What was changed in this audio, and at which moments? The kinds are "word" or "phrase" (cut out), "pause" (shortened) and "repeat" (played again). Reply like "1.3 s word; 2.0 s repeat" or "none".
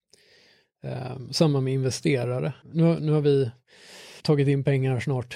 2.6 s pause; 4.2 s pause